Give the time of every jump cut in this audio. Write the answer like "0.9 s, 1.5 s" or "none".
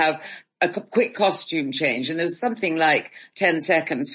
none